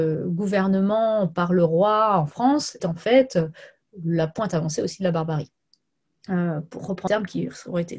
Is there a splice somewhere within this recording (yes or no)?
yes